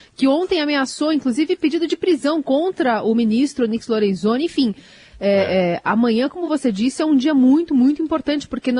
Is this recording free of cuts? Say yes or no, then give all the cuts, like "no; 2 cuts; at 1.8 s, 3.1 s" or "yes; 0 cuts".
yes; 0 cuts